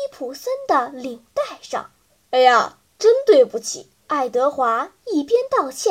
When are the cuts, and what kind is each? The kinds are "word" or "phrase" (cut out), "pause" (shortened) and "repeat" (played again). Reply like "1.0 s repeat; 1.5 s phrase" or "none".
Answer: 2.1 s pause; 4.0 s pause